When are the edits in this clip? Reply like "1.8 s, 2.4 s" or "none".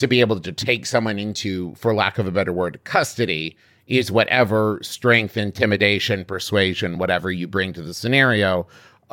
none